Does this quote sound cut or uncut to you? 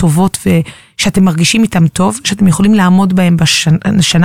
uncut